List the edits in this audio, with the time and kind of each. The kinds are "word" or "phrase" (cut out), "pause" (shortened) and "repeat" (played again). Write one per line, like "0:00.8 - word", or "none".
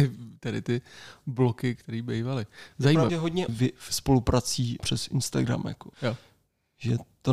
0:01.8 - word
0:03.1 - word
0:03.5 - phrase
0:04.8 - phrase
0:05.9 - pause